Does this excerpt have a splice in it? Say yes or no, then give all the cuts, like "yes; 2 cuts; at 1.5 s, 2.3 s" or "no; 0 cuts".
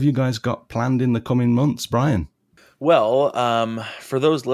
no; 0 cuts